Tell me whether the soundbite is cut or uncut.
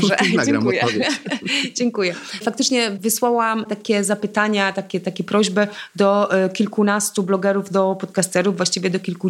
uncut